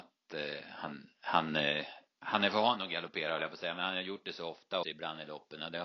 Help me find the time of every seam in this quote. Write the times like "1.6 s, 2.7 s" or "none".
4.8 s